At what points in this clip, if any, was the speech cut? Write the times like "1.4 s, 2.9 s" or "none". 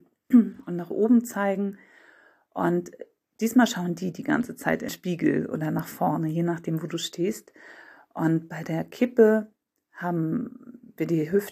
4.9 s